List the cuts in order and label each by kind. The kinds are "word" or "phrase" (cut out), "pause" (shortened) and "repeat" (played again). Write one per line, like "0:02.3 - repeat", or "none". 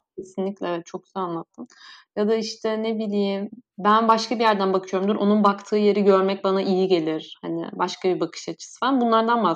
0:03.7 - pause